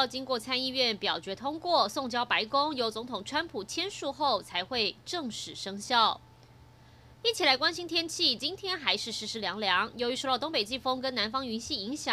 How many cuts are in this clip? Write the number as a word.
zero